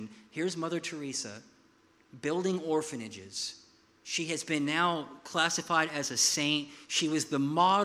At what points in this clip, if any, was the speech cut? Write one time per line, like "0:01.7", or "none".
none